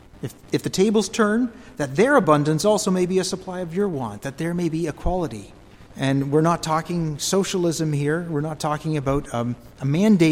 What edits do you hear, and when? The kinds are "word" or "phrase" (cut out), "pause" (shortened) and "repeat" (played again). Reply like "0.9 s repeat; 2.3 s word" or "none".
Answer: 5.9 s pause